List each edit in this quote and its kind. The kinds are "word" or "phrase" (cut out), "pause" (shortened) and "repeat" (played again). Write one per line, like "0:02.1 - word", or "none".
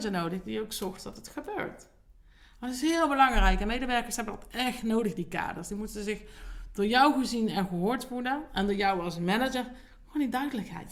none